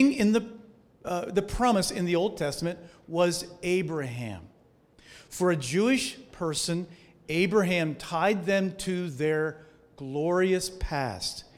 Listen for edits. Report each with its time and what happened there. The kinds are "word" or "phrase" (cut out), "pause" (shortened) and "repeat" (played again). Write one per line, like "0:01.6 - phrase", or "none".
none